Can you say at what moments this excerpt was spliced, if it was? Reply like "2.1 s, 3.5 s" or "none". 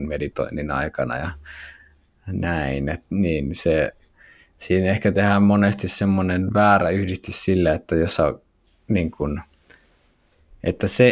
none